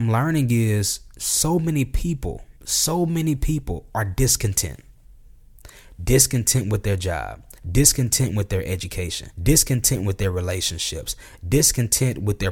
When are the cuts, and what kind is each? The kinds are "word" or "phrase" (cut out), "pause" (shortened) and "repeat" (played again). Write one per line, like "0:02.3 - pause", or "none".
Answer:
0:02.6 - pause
0:07.6 - pause
0:09.3 - pause